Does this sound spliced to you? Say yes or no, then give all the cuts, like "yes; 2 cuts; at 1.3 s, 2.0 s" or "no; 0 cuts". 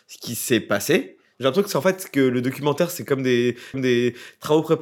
yes; 1 cut; at 3.7 s